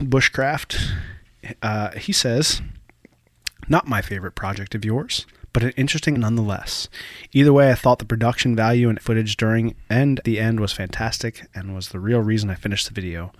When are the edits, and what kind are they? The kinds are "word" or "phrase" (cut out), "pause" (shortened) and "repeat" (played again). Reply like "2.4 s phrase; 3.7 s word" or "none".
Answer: 6.2 s word; 9.0 s word; 10.2 s word